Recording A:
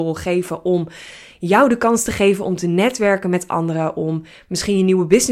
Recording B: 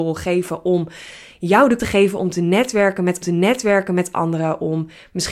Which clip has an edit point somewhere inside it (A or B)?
B